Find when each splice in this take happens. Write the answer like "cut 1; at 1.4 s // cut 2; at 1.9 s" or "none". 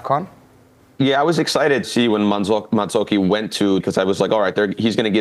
cut 1; at 1.8 s // cut 2; at 3.8 s